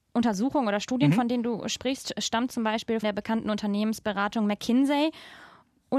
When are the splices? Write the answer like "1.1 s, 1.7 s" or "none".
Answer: 3.0 s